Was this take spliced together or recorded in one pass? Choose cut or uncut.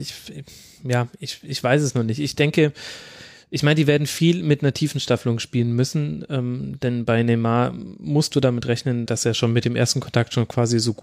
cut